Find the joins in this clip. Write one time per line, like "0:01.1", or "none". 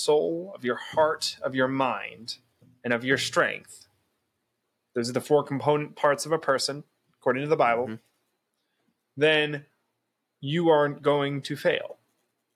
none